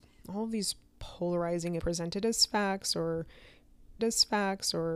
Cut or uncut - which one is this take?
cut